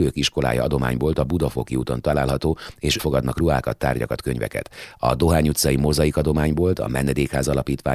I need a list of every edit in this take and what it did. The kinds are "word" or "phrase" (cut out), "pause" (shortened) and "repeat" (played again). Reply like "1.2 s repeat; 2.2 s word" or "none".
3.0 s word